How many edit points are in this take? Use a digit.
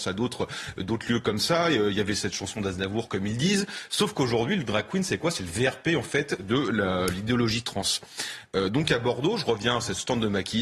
0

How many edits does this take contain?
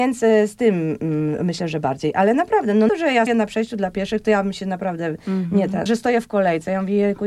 3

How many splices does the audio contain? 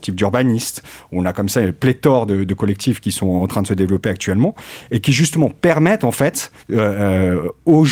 1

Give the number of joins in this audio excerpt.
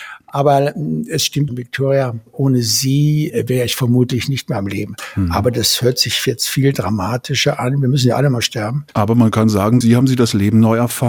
2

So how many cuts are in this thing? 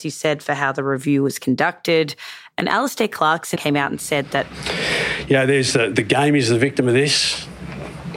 2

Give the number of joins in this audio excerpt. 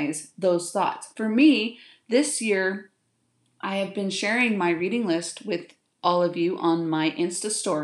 0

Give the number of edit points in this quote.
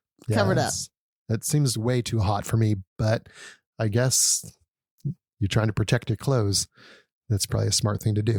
0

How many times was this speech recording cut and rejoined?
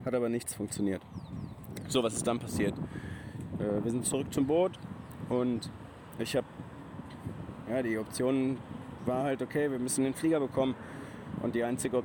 0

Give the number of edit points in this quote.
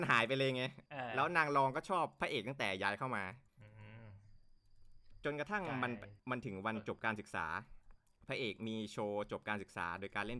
1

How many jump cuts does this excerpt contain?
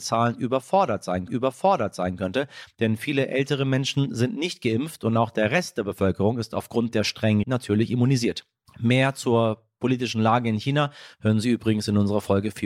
3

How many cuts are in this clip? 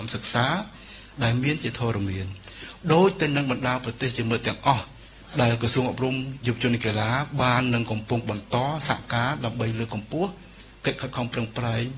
0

